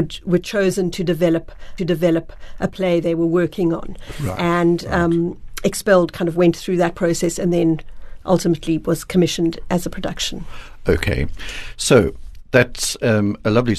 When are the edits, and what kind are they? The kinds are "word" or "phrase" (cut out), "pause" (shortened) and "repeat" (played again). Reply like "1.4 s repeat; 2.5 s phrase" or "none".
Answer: 1.8 s repeat